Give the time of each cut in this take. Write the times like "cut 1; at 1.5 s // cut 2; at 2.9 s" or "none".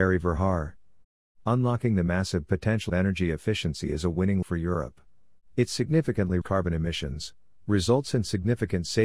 cut 1; at 1.0 s // cut 2; at 2.9 s // cut 3; at 4.4 s // cut 4; at 6.4 s